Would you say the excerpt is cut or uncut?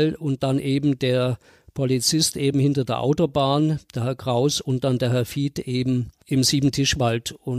uncut